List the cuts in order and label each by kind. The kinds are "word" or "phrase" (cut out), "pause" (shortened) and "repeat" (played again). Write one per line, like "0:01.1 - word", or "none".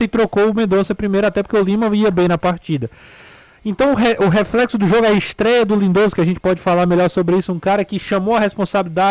none